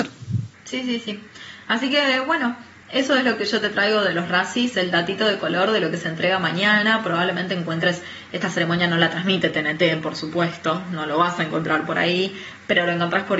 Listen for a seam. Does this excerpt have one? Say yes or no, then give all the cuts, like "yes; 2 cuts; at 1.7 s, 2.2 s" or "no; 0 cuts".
yes; 1 cut; at 4.7 s